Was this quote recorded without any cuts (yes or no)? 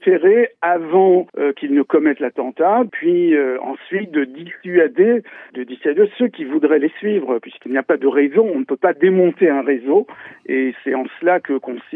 no